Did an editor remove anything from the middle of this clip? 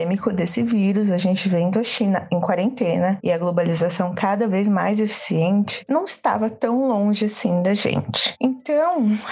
no; 0 cuts

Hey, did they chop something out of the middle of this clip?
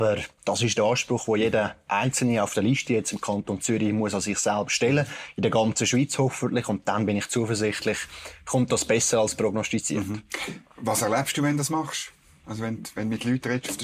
no; 0 cuts

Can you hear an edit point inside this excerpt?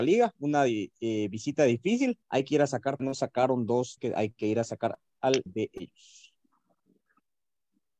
yes; 4 cuts; at 2.2 s, 3.0 s, 4.0 s, 5.5 s

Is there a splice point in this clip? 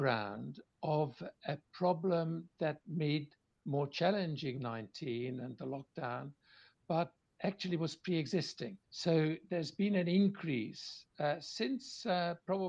yes; 3 cuts; at 2.8 s, 4.6 s, 8.8 s

